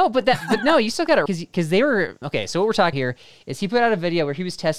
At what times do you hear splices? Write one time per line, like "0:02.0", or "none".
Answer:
0:01.3
0:02.2
0:02.9

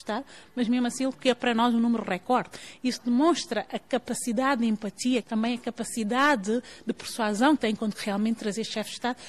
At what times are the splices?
0:01.1
0:05.2
0:07.6
0:07.9

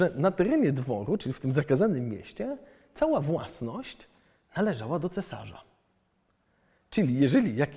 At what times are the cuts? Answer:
none

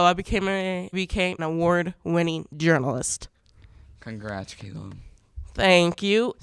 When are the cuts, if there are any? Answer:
0:00.9
0:01.4

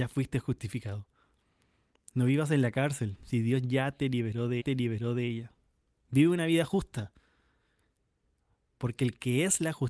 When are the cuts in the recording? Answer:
0:04.6

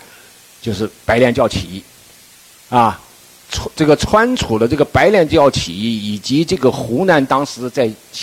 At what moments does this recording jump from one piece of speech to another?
none

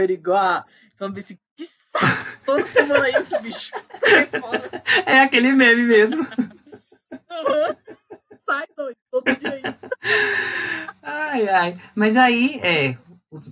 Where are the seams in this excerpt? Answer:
none

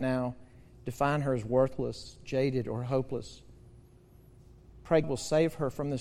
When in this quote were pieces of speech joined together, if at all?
0:05.0

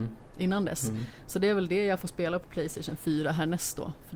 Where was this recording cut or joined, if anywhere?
none

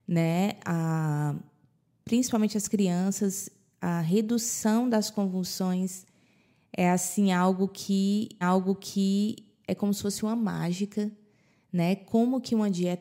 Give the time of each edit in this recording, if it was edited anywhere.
0:08.4

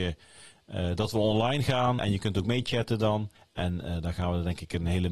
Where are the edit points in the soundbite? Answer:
0:02.0
0:03.4

